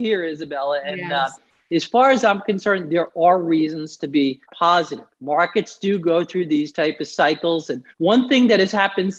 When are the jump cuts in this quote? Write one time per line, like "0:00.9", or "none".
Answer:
0:04.4
0:07.9